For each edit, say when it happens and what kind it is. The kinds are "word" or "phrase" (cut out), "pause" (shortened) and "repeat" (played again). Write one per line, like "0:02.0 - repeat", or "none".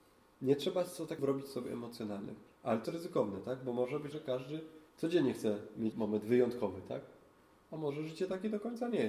0:01.2 - word
0:02.5 - pause
0:02.8 - word
0:04.1 - word
0:04.9 - pause
0:05.9 - word